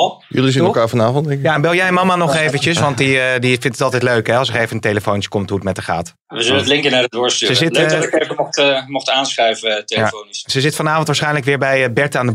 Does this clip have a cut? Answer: yes; 1 cut; at 6.2 s

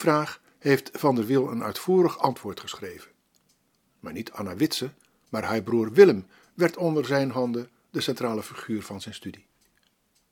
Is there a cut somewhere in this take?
no; 0 cuts

